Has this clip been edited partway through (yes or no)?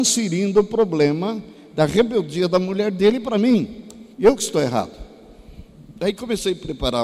yes